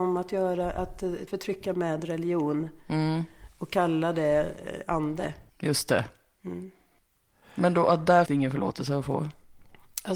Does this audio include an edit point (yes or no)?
yes